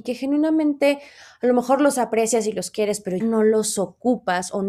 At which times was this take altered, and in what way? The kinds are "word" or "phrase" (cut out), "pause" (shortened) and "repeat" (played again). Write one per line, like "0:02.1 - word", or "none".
0:03.2 - word